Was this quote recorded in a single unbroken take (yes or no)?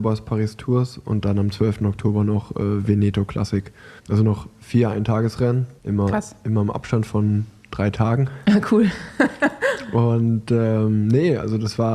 no